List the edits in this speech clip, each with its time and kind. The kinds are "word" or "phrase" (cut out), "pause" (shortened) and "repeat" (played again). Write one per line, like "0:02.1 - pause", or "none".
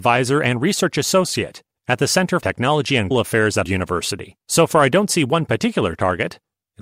0:02.4 - word
0:03.1 - word
0:03.6 - word
0:04.4 - pause

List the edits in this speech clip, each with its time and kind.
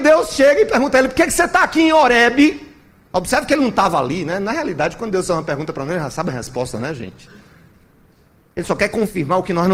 none

